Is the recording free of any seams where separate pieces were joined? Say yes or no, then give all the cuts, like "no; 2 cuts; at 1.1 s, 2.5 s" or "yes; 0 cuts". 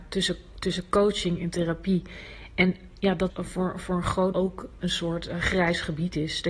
no; 3 cuts; at 3.3 s, 4.3 s, 4.8 s